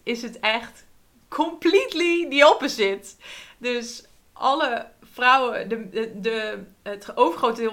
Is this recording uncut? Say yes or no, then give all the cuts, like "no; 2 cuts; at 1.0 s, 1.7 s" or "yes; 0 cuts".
yes; 0 cuts